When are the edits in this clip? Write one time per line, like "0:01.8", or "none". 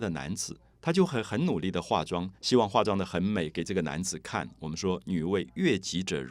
none